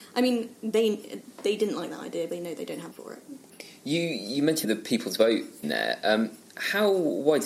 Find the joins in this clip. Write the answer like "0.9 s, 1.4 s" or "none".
2.3 s, 2.9 s, 4.6 s, 5.6 s

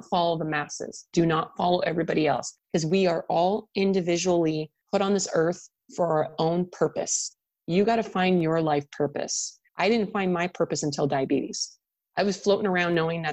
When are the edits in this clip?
2.6 s, 9.7 s

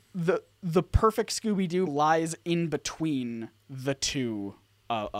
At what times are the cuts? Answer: 1.9 s

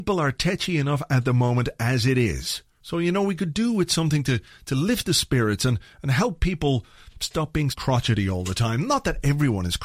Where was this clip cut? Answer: 7.7 s

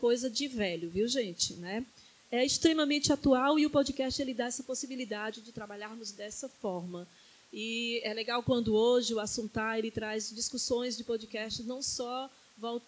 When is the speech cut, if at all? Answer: none

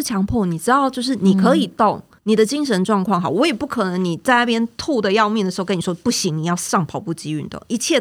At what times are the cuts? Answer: 2.2 s

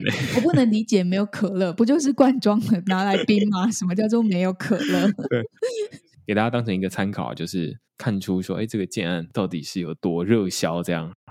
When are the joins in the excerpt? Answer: 7.9 s

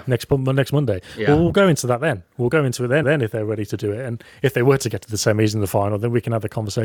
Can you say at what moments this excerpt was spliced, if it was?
3.0 s

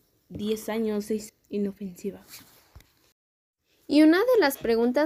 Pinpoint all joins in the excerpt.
1.3 s

